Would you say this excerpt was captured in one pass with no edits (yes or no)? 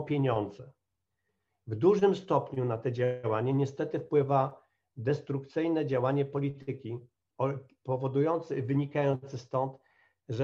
yes